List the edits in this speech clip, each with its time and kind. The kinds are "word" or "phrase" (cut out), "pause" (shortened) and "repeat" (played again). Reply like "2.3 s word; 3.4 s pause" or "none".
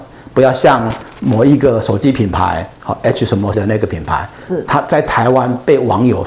3.5 s word